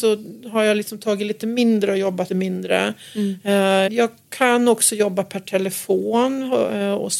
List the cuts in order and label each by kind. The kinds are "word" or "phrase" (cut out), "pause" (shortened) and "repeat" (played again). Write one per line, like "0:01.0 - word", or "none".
0:02.3 - word
0:03.9 - word